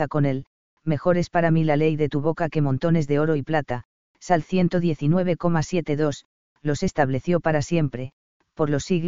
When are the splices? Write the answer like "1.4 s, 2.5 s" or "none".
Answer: none